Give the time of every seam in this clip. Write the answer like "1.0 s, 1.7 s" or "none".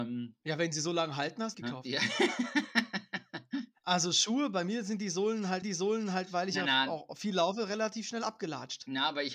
1.5 s, 5.6 s

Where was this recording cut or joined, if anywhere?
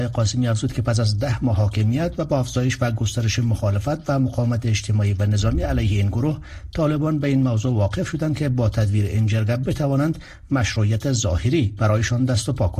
none

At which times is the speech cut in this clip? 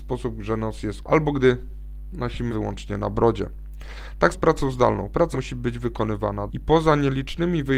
1.0 s, 2.5 s, 4.3 s, 5.3 s, 6.5 s

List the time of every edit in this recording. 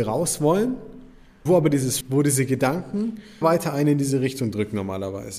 1.5 s, 2.0 s, 3.4 s

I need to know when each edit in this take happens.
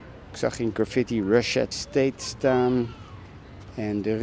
1.7 s

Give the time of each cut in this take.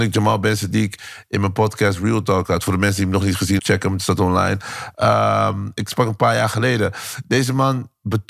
3.6 s

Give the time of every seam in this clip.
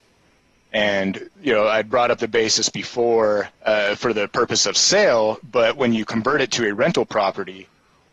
1.3 s, 3.5 s

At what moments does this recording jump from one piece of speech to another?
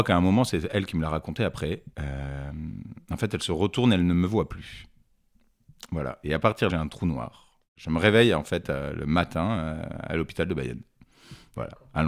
1.9 s, 6.7 s, 7.7 s

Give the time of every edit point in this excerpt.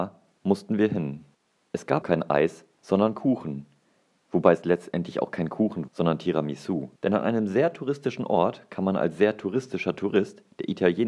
1.3 s, 2.0 s, 5.9 s, 7.0 s

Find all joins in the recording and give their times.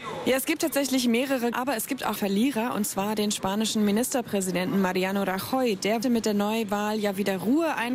1.5 s, 2.2 s, 6.0 s

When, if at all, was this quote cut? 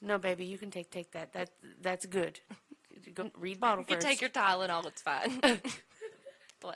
0.9 s, 3.2 s, 3.6 s

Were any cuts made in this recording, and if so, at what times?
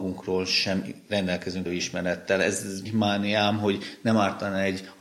1.7 s, 2.9 s

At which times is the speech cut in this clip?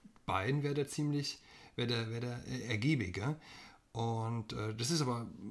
none

